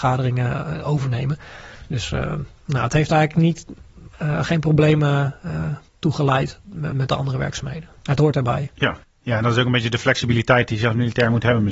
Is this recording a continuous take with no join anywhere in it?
no; 4 cuts; at 5.9 s, 6.9 s, 8.0 s, 9.0 s

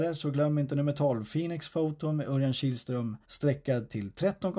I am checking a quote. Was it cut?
yes; 1 cut; at 3.2 s

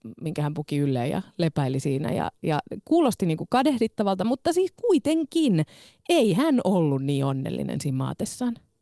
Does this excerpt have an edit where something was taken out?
no; 0 cuts

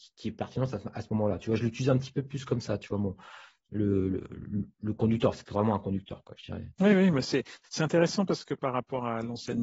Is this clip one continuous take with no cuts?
no; 1 cut; at 5.5 s

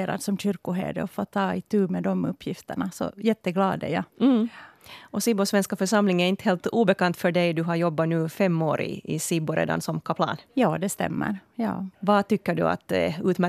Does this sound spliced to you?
yes; 3 cuts; at 4.1 s, 10.5 s, 11.9 s

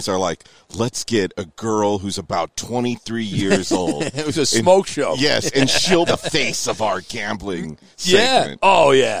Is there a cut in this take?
yes; 1 cut; at 6.1 s

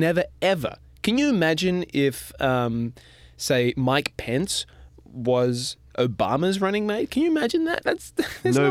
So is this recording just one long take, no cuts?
yes; 0 cuts

